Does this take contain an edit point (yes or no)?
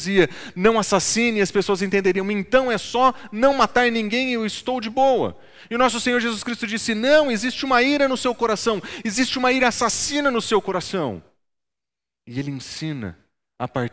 no